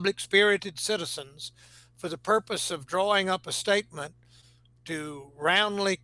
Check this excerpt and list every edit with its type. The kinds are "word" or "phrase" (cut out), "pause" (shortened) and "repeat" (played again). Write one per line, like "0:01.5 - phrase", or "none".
none